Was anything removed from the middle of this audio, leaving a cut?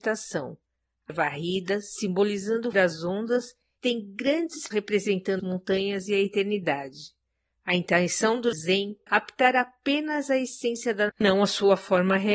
yes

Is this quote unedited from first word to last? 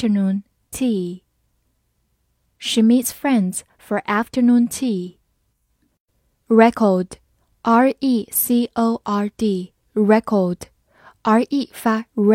yes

